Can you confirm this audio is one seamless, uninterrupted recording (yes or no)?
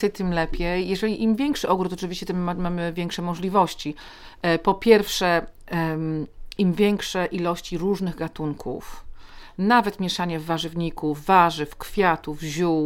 yes